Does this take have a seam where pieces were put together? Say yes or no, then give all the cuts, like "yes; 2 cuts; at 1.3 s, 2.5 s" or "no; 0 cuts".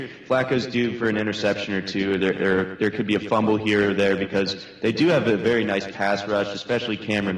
no; 0 cuts